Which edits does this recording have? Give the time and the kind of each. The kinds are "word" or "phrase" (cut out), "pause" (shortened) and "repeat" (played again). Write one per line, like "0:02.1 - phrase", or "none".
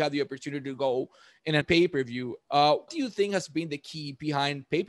0:01.6 - word
0:02.9 - word

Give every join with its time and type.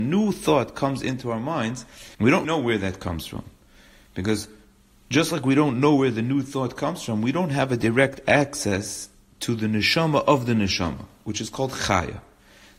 0:02.1 - pause
0:02.4 - word

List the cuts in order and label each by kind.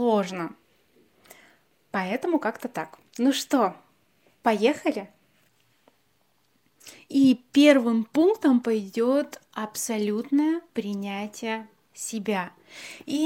0:03.1 - pause
0:06.9 - pause
0:10.7 - pause

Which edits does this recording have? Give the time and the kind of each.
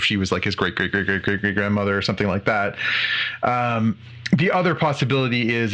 none

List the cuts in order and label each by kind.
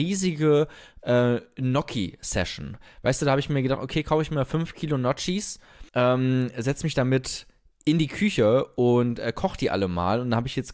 0:05.9 - pause

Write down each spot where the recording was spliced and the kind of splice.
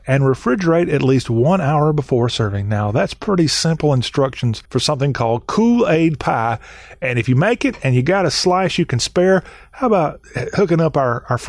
0:04.7 - pause

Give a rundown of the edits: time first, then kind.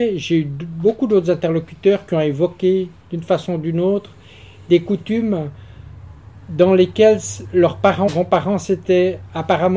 0:03.0 - pause
0:08.1 - word

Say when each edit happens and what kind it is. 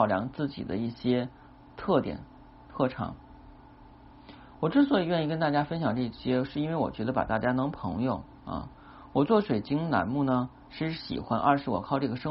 none

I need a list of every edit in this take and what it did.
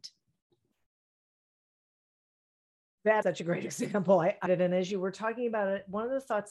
0:03.2 - word
0:04.5 - word

